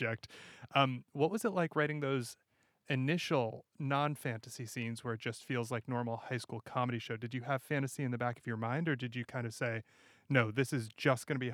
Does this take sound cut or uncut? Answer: uncut